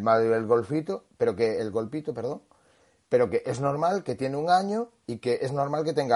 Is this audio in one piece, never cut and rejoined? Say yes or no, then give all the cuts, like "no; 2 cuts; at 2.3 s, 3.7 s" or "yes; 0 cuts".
yes; 0 cuts